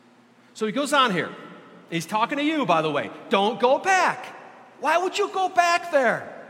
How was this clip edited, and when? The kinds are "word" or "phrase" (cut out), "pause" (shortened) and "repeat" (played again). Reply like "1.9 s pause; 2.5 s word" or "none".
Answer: none